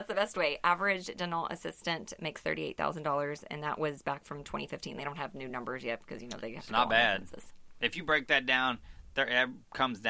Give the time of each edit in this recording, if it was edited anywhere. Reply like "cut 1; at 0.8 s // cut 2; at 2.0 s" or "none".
none

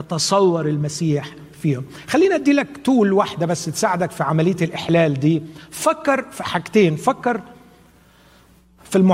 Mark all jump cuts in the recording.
none

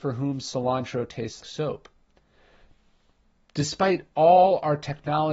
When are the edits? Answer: cut 1; at 1.4 s

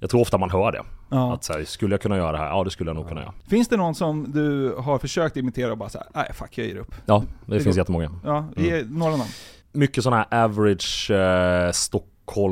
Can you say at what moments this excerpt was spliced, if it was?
none

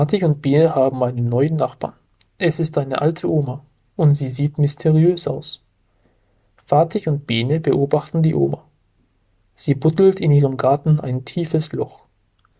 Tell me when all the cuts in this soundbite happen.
cut 1; at 2.1 s

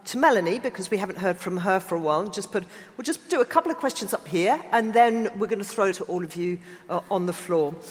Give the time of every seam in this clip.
cut 1; at 5.9 s

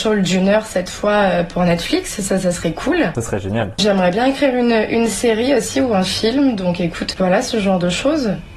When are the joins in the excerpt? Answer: cut 1; at 7.1 s

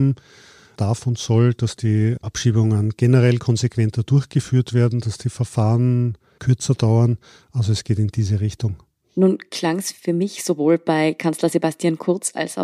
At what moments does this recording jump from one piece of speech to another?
none

